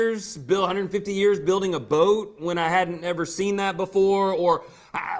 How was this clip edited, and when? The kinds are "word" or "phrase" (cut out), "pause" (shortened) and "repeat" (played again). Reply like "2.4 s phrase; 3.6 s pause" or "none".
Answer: none